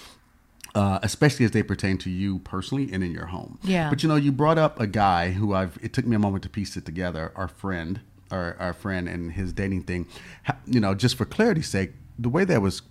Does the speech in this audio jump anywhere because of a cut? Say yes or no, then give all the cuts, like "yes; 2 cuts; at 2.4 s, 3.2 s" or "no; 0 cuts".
no; 0 cuts